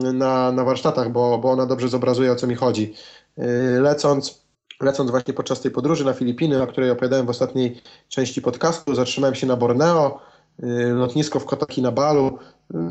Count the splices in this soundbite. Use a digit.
1